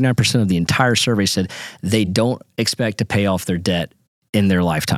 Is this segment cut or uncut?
uncut